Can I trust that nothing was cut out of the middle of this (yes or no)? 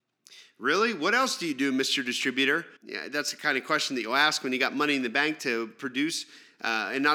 no